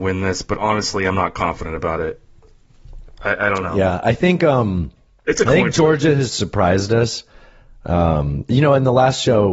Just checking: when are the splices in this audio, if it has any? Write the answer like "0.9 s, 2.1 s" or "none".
none

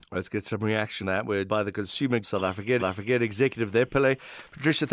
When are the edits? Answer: 1.0 s, 1.5 s, 2.2 s, 2.8 s, 3.9 s

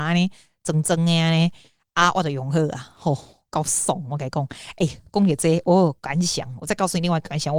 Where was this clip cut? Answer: none

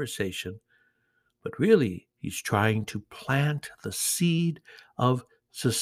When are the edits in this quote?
2.1 s

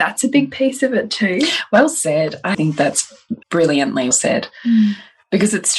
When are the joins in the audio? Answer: 2.5 s, 3.4 s, 4.1 s

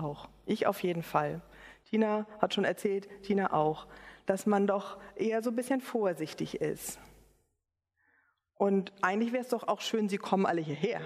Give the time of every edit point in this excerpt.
none

